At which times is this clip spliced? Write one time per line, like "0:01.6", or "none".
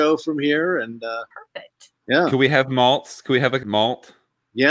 0:01.3
0:03.6